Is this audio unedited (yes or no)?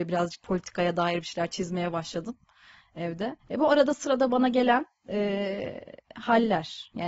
no